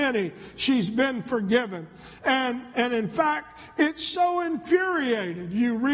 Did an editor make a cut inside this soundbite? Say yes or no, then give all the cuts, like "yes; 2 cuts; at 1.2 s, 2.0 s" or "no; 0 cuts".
no; 0 cuts